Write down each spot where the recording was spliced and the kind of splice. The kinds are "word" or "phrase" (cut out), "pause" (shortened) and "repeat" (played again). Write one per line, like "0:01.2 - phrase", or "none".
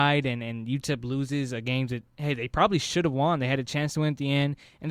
none